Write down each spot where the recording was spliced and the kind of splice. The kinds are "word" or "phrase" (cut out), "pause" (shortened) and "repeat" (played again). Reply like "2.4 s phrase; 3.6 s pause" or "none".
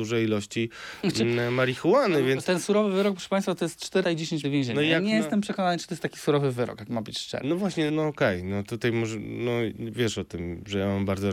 4.0 s word; 4.4 s word; 7.9 s word